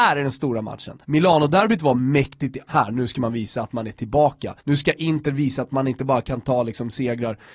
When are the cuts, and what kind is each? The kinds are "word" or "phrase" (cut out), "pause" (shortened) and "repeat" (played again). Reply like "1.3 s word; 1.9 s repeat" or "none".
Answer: 1.0 s pause; 2.7 s phrase; 4.6 s pause